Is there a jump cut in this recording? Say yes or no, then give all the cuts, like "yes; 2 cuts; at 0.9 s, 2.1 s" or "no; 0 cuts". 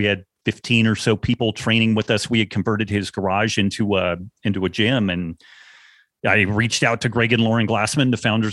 no; 0 cuts